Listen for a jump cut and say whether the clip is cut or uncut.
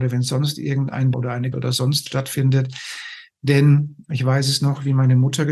cut